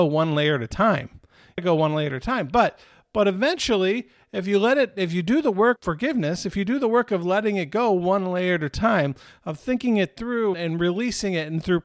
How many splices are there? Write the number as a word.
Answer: three